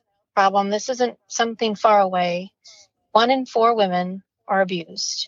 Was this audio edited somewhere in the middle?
no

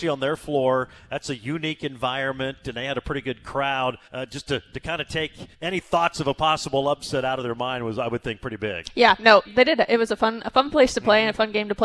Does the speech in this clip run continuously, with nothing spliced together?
no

